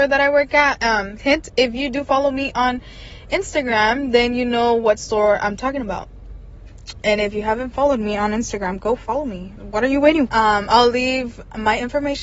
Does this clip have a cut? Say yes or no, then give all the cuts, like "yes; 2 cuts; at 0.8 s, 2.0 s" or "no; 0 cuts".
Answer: yes; 4 cuts; at 1.2 s, 7.0 s, 9.6 s, 10.3 s